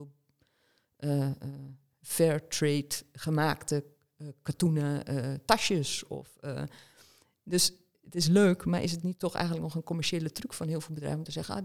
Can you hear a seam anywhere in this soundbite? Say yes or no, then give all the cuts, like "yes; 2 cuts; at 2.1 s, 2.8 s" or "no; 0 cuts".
no; 0 cuts